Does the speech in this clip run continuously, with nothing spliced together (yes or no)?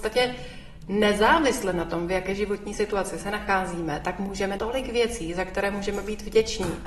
no